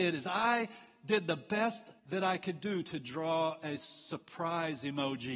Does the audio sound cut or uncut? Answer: cut